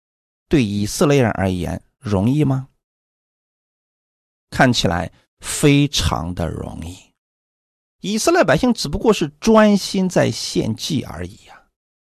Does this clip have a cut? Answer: no; 0 cuts

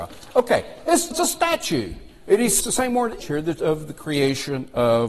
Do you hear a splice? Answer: yes; 4 cuts; at 1.1 s, 2.6 s, 3.2 s, 3.6 s

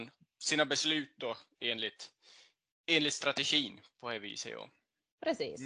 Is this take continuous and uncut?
yes; 0 cuts

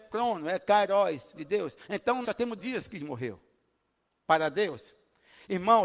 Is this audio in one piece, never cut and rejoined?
no; 4 cuts; at 1.4 s, 2.2 s, 2.6 s, 3.0 s

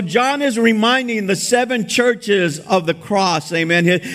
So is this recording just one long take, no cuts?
yes; 0 cuts

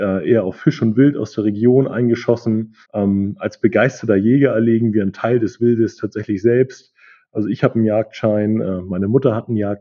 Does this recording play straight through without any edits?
no; 1 cut; at 2.8 s

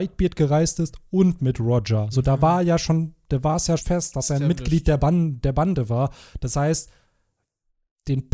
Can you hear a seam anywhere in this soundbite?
yes; 1 cut; at 3.8 s

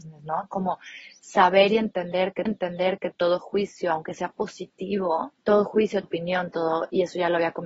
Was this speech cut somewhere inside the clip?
yes; 3 cuts; at 2.5 s, 5.4 s, 6.0 s

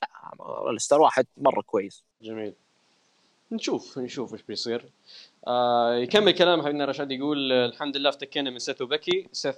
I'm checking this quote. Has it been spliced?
no; 0 cuts

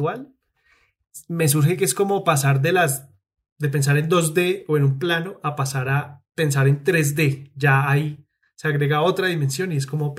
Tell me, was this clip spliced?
no; 0 cuts

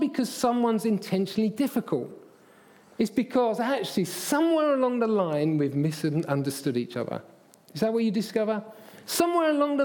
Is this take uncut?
yes; 0 cuts

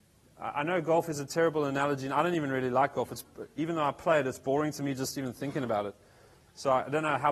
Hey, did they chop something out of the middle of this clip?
no; 0 cuts

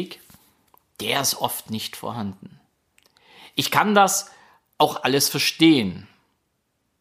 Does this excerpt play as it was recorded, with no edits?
yes; 0 cuts

